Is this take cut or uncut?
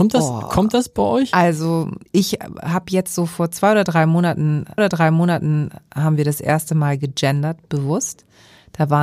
cut